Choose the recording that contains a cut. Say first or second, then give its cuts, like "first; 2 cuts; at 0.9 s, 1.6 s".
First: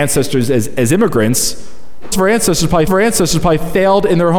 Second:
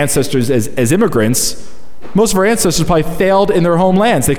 first; 2 cuts; at 2.1 s, 2.9 s